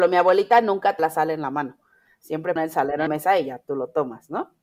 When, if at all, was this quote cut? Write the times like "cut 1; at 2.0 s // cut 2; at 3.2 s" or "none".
cut 1; at 1.0 s // cut 2; at 2.6 s // cut 3; at 3.1 s